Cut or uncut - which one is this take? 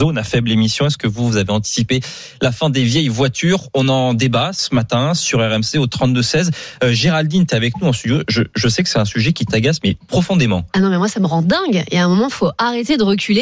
uncut